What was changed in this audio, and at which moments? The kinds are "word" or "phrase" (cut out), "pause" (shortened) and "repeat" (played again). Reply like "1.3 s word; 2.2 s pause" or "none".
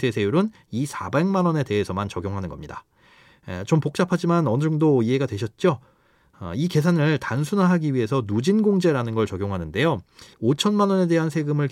10.3 s pause